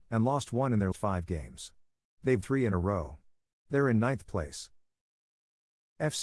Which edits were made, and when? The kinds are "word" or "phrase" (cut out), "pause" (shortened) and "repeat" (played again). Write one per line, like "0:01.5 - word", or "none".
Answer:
0:00.9 - word
0:02.4 - word

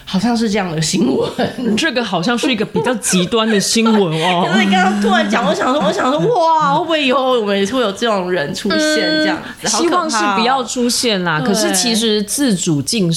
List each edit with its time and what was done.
0:05.8 - repeat

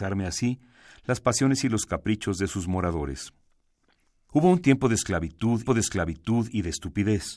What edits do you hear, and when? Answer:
0:05.7 - repeat

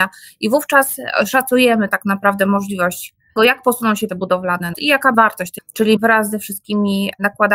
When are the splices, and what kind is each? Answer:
0:03.4 - word
0:04.1 - word
0:04.7 - word
0:05.1 - word
0:05.6 - word
0:06.0 - word

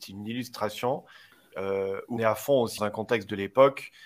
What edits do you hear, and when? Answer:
0:02.2 - word
0:02.8 - word

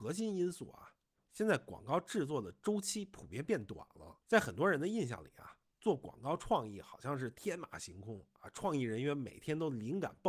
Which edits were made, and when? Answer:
0:01.2 - phrase
0:04.2 - pause

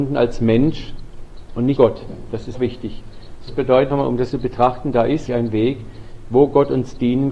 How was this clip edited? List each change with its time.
0:01.8 - word
0:02.5 - word
0:03.5 - word
0:03.9 - word
0:04.3 - word
0:05.3 - word

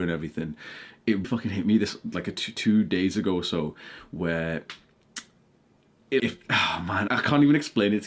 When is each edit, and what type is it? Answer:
0:01.2 - word
0:06.2 - word
0:07.1 - word

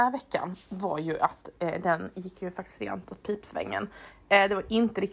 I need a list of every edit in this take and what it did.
none

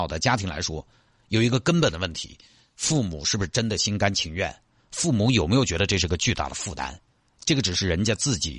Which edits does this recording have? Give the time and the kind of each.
none

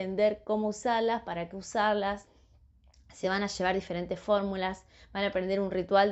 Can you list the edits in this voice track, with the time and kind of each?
none

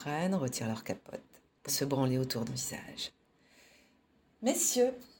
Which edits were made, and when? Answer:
0:01.7 - word
0:02.5 - word

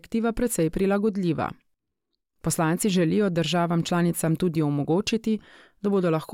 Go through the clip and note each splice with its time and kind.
none

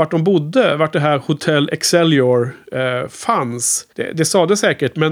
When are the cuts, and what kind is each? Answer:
0:03.9 - pause

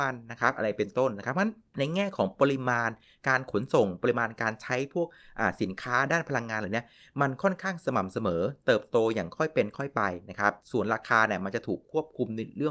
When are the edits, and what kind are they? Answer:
0:10.6 - pause

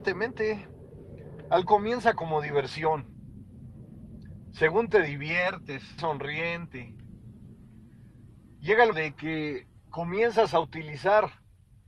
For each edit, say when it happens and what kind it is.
0:01.7 - word
0:04.9 - word
0:06.0 - word
0:08.9 - word
0:09.8 - pause

